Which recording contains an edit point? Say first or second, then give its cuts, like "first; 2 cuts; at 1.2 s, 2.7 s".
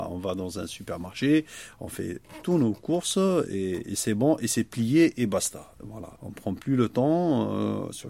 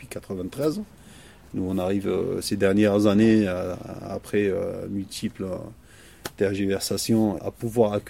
first; 1 cut; at 6.2 s